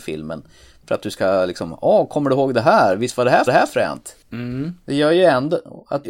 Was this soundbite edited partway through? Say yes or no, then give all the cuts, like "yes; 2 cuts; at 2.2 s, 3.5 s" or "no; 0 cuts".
yes; 1 cut; at 3.5 s